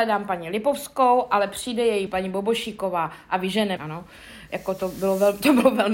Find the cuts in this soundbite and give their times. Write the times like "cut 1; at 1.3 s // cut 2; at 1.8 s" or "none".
cut 1; at 2.1 s // cut 2; at 3.8 s